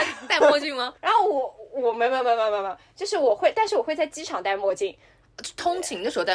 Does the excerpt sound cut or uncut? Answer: cut